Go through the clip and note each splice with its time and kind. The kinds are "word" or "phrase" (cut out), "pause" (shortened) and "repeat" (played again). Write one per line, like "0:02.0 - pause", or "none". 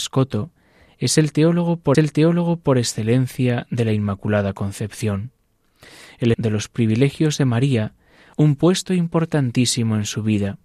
0:01.9 - repeat
0:06.3 - word
0:08.3 - word